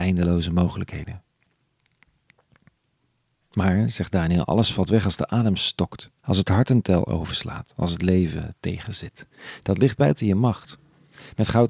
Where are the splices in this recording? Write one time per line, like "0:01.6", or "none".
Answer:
0:06.2